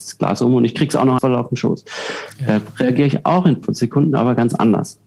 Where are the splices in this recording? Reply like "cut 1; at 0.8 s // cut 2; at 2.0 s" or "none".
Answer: cut 1; at 1.2 s // cut 2; at 3.6 s